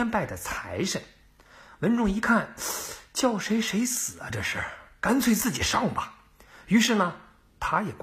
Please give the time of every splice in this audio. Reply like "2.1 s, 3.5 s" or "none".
none